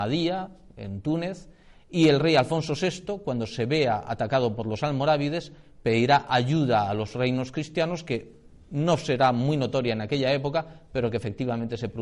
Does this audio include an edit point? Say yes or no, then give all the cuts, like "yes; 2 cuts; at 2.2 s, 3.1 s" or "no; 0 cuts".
no; 0 cuts